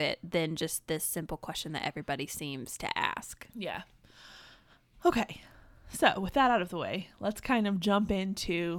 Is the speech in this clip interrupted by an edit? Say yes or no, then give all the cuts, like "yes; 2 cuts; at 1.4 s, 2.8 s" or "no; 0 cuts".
no; 0 cuts